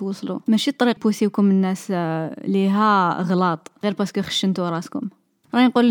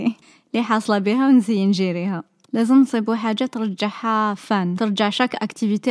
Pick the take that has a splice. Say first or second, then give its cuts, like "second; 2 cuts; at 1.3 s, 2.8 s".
first; 1 cut; at 1.0 s